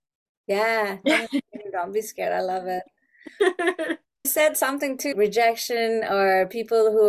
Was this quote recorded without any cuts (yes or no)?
no